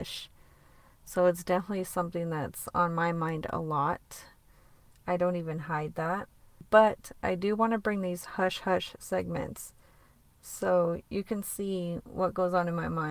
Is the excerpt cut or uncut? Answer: uncut